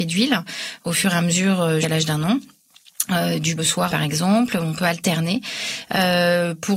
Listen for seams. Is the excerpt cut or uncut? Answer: cut